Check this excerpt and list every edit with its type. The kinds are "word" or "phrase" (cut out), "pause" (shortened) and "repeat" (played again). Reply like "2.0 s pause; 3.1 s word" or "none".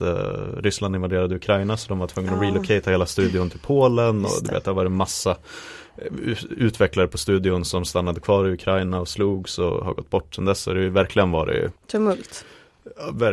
11.8 s pause